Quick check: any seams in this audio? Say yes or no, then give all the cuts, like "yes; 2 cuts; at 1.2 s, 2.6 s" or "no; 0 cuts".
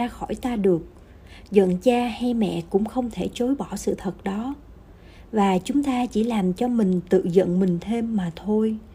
no; 0 cuts